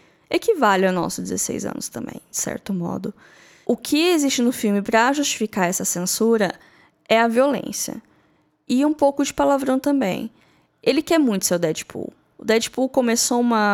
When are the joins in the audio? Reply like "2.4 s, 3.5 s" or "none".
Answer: none